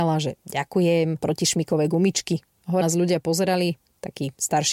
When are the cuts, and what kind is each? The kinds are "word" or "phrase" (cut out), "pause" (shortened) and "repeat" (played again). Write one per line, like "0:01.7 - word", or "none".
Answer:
0:01.2 - word
0:02.8 - phrase

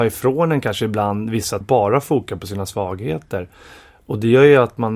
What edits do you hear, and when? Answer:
0:01.6 - phrase

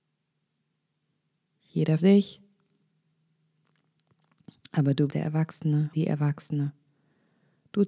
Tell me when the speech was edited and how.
0:02.0 - word
0:05.1 - word
0:05.9 - word

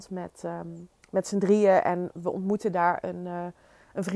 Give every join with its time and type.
0:01.0 - pause

